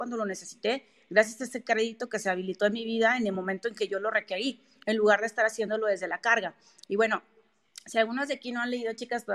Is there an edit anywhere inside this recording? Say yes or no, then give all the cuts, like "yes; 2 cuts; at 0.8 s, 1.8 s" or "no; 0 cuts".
no; 0 cuts